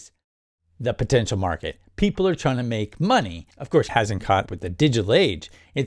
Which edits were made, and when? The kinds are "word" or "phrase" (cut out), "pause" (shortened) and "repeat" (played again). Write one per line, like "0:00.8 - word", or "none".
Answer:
0:03.5 - pause
0:03.9 - word
0:04.5 - word